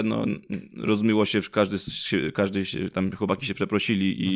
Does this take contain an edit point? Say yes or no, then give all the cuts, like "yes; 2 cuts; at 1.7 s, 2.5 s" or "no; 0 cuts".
no; 0 cuts